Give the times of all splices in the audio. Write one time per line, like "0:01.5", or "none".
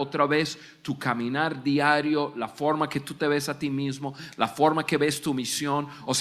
none